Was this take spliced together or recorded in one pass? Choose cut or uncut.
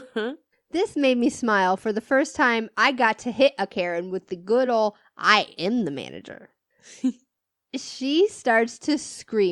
uncut